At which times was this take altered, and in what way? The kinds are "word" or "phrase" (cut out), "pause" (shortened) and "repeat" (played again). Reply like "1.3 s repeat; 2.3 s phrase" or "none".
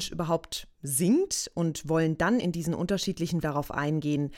2.4 s word; 3.4 s word